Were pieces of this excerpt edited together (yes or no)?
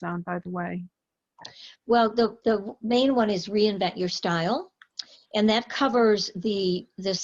no